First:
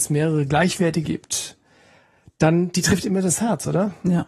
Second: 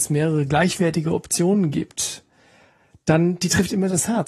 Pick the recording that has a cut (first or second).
first